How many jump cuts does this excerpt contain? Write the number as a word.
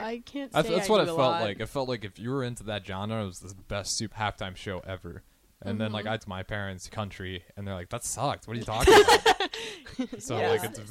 three